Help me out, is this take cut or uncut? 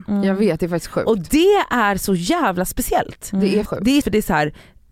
cut